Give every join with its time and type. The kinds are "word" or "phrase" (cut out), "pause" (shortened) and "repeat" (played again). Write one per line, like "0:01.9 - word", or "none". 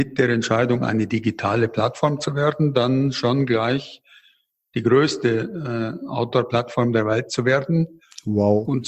none